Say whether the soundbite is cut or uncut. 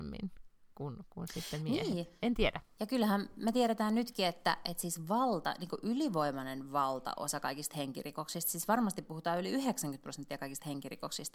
uncut